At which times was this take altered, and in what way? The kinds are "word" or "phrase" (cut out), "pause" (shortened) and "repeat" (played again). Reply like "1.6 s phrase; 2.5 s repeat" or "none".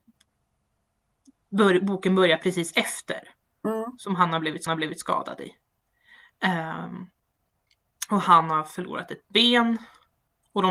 4.7 s repeat

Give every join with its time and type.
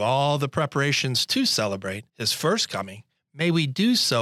2.1 s pause; 3.2 s pause

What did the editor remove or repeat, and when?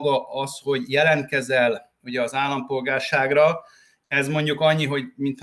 none

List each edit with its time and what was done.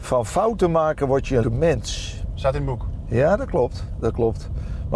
1.4 s word

